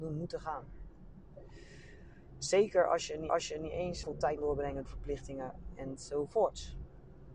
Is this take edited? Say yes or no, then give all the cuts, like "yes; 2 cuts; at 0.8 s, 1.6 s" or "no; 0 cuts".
yes; 4 cuts; at 3.3 s, 4.0 s, 4.4 s, 4.9 s